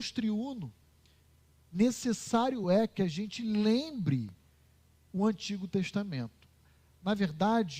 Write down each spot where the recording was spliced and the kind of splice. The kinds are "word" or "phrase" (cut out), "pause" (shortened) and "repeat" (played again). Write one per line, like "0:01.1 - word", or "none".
none